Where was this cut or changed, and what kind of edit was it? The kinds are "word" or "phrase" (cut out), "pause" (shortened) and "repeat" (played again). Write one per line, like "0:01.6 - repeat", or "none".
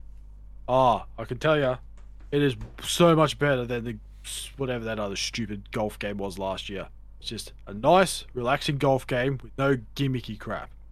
none